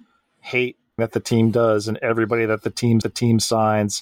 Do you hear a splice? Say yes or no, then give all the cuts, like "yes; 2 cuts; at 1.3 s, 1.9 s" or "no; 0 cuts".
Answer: yes; 2 cuts; at 1.0 s, 3.0 s